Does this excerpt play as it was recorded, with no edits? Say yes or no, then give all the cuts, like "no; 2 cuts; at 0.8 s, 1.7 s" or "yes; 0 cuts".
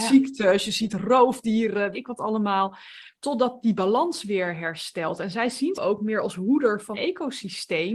no; 3 cuts; at 1.9 s, 5.7 s, 6.9 s